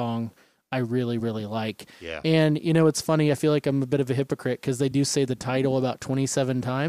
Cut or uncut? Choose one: uncut